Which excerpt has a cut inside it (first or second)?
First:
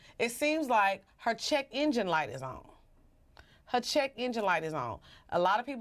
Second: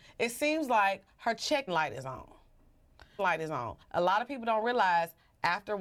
second